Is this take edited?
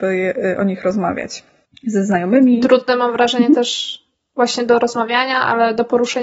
no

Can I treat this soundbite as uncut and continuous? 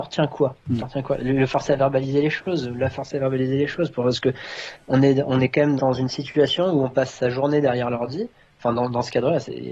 no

